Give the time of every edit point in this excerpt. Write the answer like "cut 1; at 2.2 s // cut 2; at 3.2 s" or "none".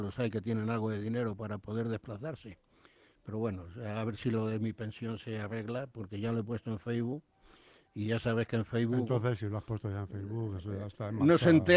none